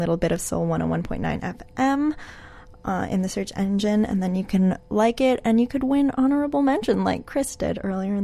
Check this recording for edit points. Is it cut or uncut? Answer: uncut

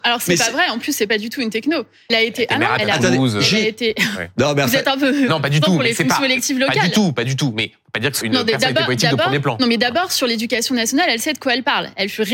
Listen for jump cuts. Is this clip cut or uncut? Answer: cut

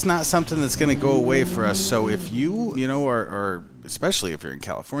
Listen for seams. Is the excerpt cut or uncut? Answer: cut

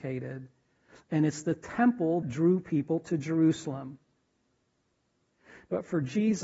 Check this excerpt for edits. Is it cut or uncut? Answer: cut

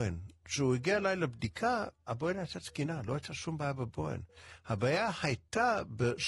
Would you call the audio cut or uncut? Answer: uncut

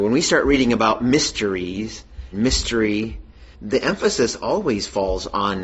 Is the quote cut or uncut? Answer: cut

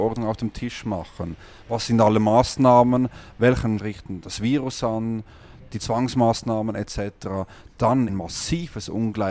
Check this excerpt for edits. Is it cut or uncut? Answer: cut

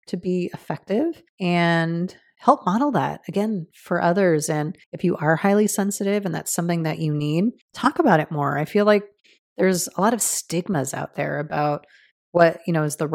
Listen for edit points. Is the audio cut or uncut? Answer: cut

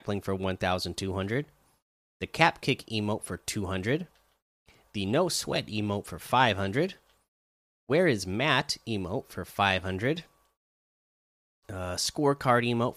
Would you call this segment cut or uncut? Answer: uncut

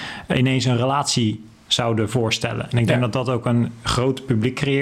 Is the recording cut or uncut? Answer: uncut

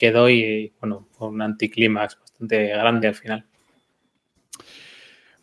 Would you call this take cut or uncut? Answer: cut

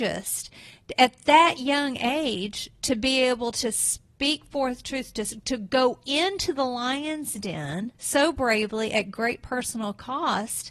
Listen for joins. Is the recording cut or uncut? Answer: cut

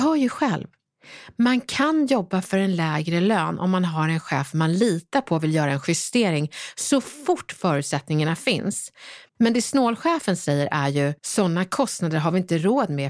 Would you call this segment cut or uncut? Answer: cut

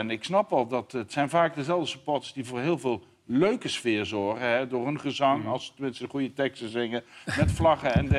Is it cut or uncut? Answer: uncut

